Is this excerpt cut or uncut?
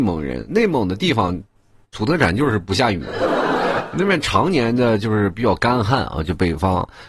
uncut